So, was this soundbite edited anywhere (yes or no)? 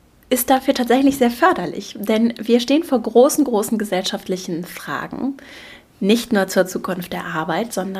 no